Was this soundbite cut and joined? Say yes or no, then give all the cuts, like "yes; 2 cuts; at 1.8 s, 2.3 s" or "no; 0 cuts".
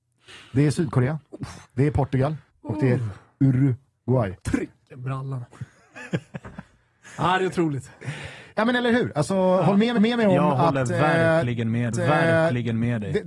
yes; 5 cuts; at 1.6 s, 2.5 s, 4.4 s, 10.0 s, 11.9 s